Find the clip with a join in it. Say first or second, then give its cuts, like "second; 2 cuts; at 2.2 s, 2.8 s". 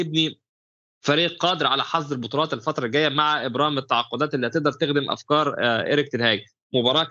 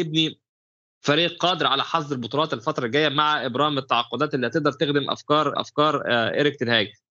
second; 1 cut; at 5.5 s